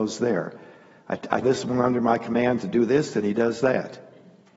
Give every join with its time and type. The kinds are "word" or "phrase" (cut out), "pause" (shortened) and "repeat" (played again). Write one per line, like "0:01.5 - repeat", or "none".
0:01.4 - word